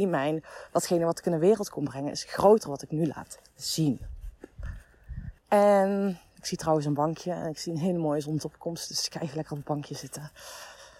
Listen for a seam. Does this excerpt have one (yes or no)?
yes